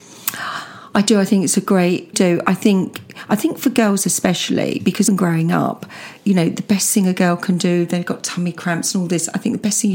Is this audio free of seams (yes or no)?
no